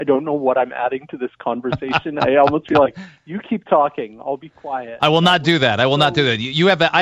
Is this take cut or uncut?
uncut